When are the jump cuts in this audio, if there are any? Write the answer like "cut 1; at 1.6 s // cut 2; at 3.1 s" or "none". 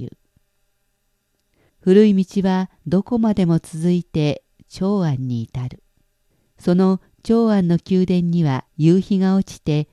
cut 1; at 1.7 s // cut 2; at 2.8 s // cut 3; at 6.3 s // cut 4; at 8.7 s